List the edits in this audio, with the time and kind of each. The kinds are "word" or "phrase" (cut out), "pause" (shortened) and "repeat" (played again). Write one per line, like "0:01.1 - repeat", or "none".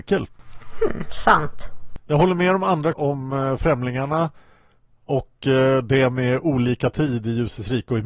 0:02.9 - word